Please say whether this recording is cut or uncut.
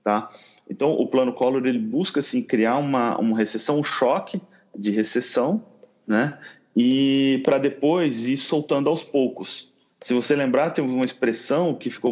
uncut